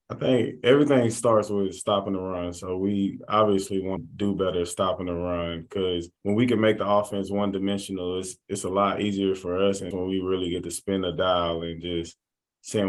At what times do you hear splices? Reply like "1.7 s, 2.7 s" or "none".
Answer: 4.0 s, 6.2 s, 9.9 s